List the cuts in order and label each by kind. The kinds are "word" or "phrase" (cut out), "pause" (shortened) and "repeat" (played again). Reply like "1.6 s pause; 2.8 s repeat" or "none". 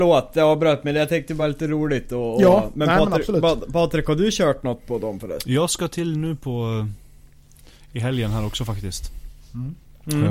none

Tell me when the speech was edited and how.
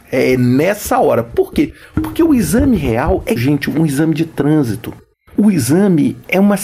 3.4 s word

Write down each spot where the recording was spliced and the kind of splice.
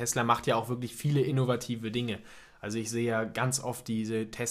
none

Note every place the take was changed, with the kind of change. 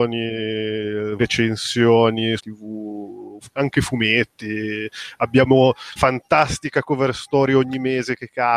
1.2 s word; 2.4 s phrase; 6.0 s word

